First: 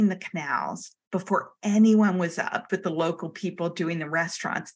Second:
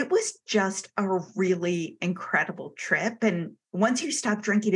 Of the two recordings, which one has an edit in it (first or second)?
first